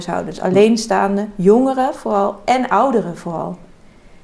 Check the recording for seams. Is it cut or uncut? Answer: uncut